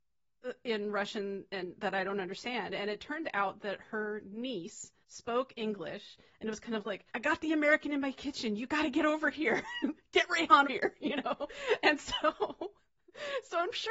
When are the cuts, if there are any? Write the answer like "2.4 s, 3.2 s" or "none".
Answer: 5.0 s, 7.1 s, 10.6 s